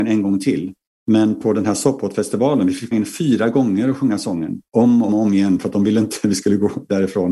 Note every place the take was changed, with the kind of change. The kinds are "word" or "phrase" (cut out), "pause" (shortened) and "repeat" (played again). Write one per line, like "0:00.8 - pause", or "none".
0:02.9 - word
0:05.1 - word